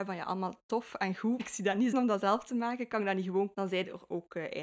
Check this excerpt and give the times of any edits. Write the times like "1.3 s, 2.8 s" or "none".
1.4 s, 1.9 s, 3.5 s